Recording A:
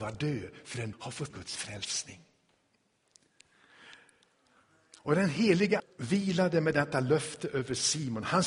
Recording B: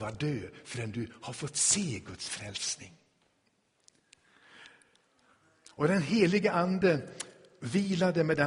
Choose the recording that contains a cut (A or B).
A